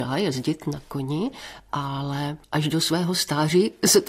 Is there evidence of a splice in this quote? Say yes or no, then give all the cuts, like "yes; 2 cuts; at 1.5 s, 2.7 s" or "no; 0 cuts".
yes; 1 cut; at 2.4 s